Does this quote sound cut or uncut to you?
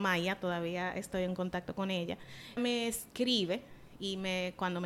cut